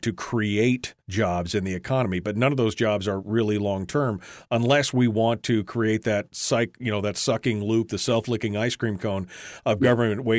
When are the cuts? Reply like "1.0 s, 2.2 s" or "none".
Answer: 1.0 s